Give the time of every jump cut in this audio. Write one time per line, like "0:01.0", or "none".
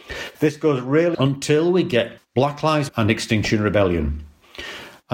0:01.1
0:02.2
0:02.9